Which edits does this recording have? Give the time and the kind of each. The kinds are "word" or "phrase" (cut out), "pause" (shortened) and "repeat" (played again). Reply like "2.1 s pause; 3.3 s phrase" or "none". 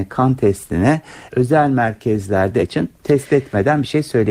1.3 s word; 2.6 s word; 2.9 s pause